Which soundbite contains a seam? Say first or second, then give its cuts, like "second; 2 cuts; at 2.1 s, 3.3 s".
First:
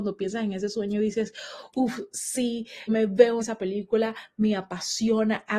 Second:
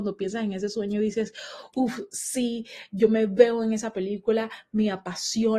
first; 2 cuts; at 2.9 s, 3.4 s